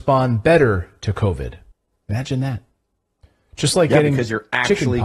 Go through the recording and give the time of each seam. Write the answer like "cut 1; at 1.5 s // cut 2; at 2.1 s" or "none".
cut 1; at 1.7 s